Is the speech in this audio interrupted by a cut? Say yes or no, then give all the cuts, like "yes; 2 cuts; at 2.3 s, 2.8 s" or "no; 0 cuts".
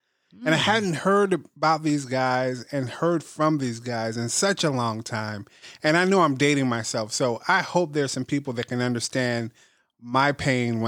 no; 0 cuts